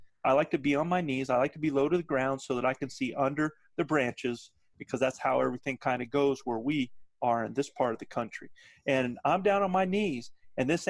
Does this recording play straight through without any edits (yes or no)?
yes